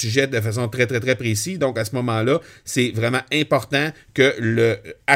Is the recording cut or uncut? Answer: uncut